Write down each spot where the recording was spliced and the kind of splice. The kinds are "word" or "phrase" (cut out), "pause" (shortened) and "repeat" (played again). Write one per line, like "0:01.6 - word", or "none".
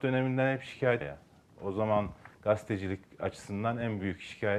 0:01.0 - word